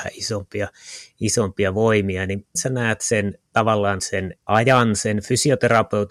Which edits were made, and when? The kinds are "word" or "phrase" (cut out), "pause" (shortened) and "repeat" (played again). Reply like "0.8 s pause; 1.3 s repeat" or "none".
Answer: 2.6 s word; 4.0 s word; 4.4 s pause